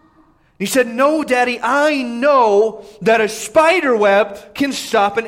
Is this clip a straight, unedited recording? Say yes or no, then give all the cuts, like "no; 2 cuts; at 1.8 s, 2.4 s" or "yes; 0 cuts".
yes; 0 cuts